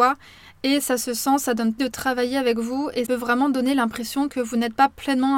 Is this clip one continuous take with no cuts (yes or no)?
no